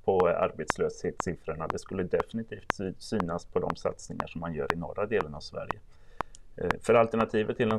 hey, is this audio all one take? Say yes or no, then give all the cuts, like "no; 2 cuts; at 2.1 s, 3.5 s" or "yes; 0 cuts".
yes; 0 cuts